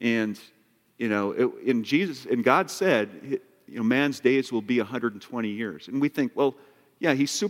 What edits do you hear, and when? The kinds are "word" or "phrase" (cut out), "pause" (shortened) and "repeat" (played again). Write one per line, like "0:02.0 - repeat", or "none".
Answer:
none